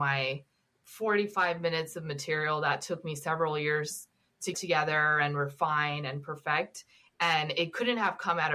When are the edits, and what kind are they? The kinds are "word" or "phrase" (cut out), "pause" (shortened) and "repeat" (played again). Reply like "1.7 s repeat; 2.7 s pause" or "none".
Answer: 4.5 s word